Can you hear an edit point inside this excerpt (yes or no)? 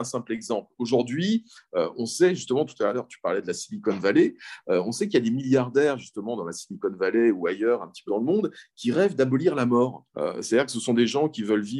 yes